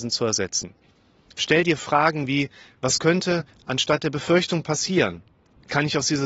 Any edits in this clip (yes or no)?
no